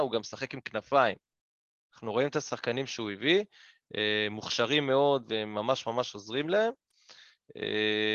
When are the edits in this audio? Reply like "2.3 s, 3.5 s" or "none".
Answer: none

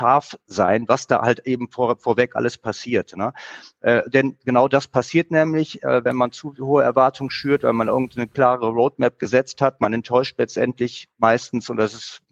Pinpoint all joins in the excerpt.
11.1 s

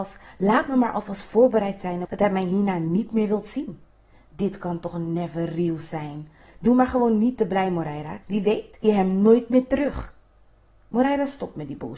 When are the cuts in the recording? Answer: 2.0 s, 8.2 s, 8.8 s

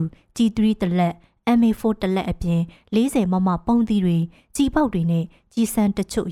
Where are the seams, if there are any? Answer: none

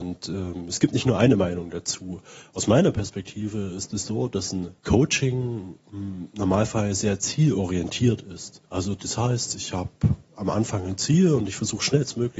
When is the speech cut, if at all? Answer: 4.8 s, 8.6 s

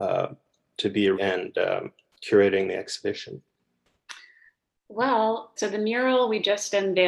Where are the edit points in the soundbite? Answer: 1.1 s, 5.6 s

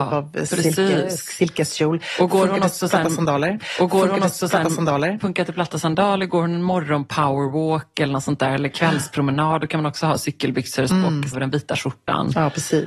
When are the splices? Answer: 3.6 s, 10.9 s, 11.3 s

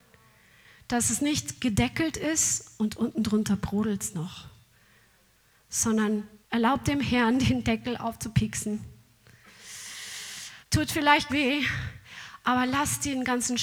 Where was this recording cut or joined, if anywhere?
6.4 s, 10.6 s, 11.3 s

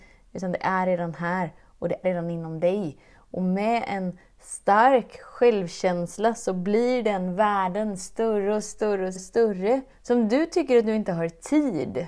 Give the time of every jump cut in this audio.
2.0 s, 9.2 s, 9.9 s

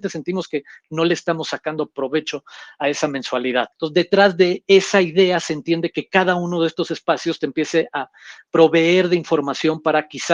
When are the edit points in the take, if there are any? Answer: 3.7 s

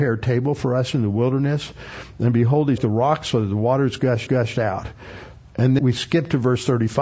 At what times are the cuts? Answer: 2.8 s, 4.3 s, 5.8 s

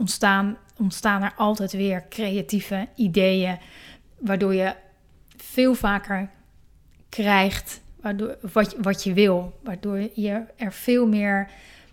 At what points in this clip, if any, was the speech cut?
none

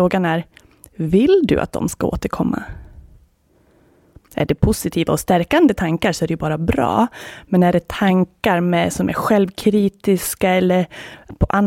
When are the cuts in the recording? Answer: none

